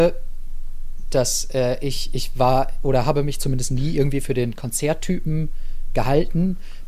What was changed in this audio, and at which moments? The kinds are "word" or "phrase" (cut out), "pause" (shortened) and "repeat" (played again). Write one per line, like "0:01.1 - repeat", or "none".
none